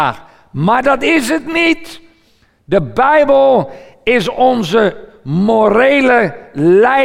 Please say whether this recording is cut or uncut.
uncut